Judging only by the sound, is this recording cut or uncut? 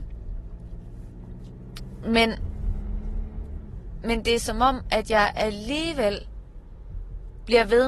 uncut